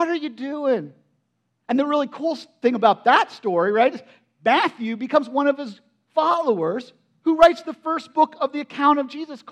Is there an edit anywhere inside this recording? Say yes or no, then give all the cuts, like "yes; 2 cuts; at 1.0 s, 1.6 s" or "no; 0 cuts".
no; 0 cuts